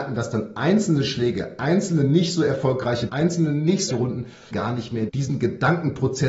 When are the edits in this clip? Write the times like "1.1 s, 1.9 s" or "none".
3.1 s, 3.9 s, 4.5 s, 5.1 s